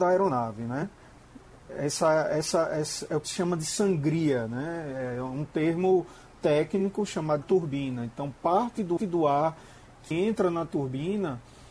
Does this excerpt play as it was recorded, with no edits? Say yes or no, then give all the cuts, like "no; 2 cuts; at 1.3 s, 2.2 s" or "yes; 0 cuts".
no; 4 cuts; at 3.2 s, 7.4 s, 9.0 s, 10.1 s